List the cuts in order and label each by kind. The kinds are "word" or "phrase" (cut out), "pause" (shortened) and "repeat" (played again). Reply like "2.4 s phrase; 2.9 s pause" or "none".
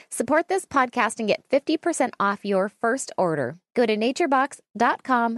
3.7 s pause

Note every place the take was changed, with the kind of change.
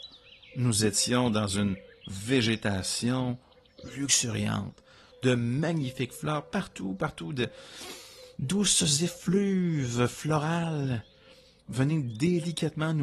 none

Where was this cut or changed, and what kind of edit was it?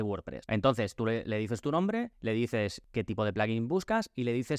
none

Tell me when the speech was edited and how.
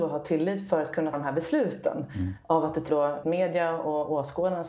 1.1 s word; 2.9 s word; 3.2 s word

